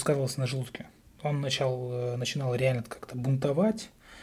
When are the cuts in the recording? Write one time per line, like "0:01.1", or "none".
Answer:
0:01.0